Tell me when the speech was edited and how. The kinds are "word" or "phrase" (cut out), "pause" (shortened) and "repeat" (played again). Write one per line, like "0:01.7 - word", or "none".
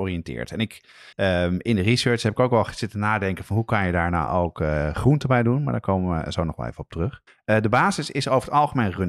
0:01.1 - pause
0:07.3 - pause